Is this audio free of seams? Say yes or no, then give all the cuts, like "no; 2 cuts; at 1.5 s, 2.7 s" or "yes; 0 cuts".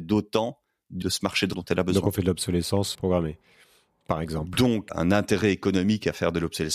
no; 4 cuts; at 1.0 s, 1.5 s, 2.9 s, 4.9 s